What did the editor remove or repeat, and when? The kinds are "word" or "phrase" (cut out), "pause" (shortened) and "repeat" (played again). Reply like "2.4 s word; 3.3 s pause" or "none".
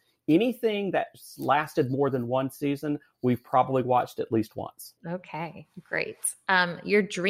5.0 s pause